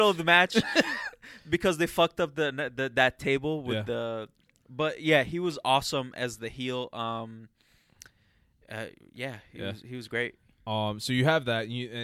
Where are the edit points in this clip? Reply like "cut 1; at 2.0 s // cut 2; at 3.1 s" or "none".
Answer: none